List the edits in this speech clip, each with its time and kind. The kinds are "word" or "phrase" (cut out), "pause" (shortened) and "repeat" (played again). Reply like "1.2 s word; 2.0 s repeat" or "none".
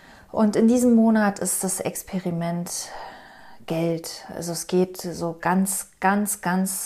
none